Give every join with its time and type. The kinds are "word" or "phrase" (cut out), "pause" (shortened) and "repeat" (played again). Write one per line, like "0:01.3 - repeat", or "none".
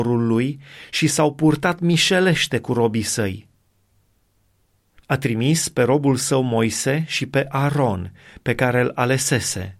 none

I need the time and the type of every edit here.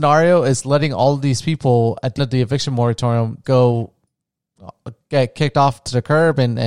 0:02.2 - word
0:03.4 - word

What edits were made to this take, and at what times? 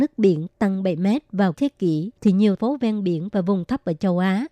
0:01.5 - word
0:02.2 - pause
0:02.6 - word

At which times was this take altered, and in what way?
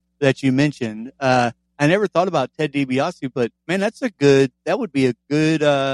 0:03.6 - pause

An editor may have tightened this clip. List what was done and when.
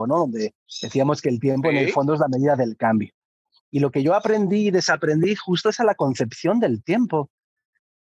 none

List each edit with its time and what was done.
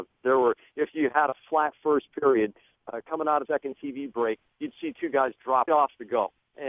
0:03.4 - word
0:05.7 - word

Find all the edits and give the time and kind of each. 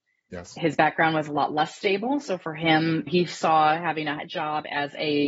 none

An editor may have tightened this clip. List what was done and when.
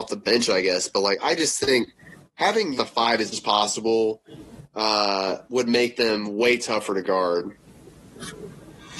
0:01.2 - word
0:02.8 - phrase
0:03.3 - word
0:05.4 - pause

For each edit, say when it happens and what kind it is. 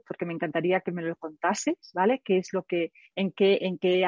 none

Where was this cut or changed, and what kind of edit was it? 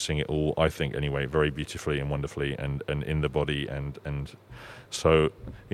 none

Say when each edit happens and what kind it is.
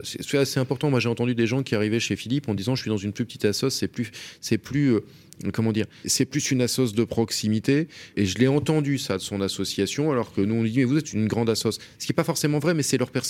0:06.0 - word
0:08.1 - word

